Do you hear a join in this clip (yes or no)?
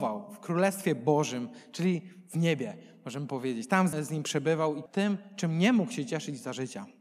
yes